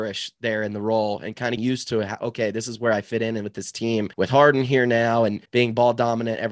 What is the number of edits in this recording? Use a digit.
3